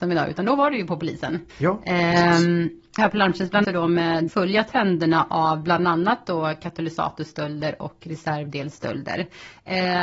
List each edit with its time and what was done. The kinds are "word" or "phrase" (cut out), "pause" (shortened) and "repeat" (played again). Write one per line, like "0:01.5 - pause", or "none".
0:01.5 - pause
0:03.0 - phrase
0:03.6 - phrase
0:04.3 - word